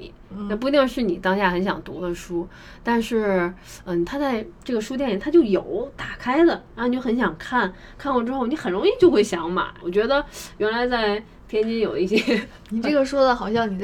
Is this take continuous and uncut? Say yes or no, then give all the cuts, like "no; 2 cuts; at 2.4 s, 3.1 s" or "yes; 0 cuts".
yes; 0 cuts